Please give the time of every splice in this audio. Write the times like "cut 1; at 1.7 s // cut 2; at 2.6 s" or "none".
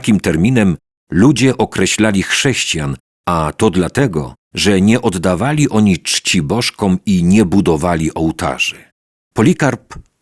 cut 1; at 4.4 s

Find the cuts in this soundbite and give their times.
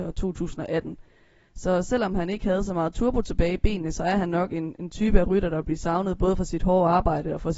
none

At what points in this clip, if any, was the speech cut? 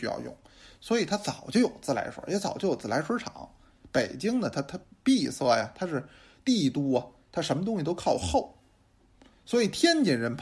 none

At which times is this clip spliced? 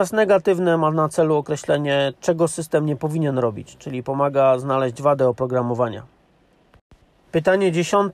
none

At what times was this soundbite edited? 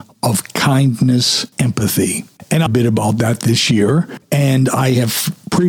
cut 1; at 1.5 s // cut 2; at 2.7 s

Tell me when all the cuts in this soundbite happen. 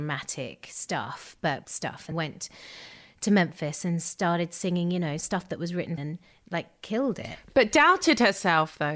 cut 1; at 1.6 s // cut 2; at 2.1 s // cut 3; at 6.0 s

